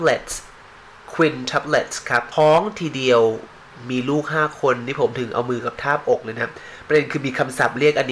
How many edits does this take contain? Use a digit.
1